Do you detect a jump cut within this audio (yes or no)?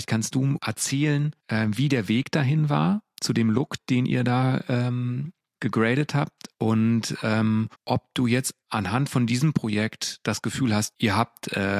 yes